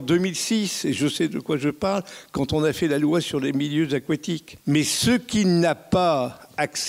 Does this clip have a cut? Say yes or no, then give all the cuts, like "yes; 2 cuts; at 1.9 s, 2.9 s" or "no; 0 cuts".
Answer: yes; 1 cut; at 4.6 s